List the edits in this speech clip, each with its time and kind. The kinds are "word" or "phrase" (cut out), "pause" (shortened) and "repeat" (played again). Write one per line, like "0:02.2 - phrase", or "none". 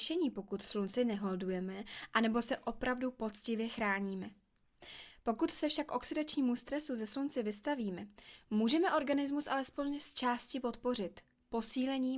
none